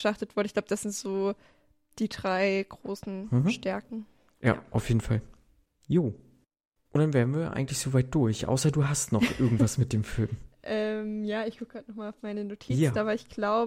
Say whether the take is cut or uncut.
uncut